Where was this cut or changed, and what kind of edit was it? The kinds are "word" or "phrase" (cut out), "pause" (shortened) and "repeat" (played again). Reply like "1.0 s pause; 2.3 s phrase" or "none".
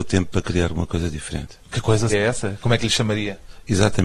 1.6 s pause; 2.1 s word